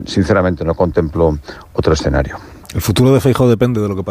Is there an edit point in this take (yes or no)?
yes